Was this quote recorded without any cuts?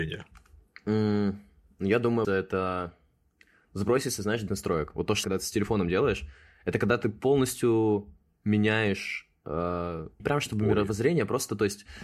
no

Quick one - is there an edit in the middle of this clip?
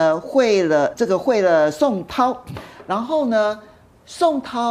yes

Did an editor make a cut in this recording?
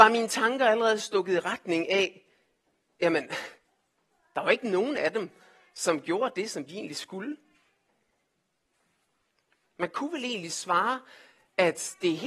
no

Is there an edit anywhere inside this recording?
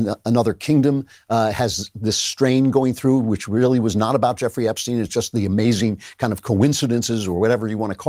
no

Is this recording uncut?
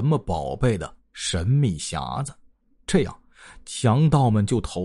yes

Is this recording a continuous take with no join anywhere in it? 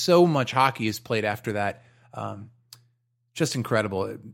yes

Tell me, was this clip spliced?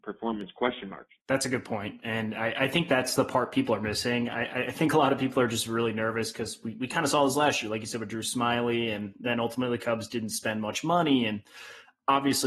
yes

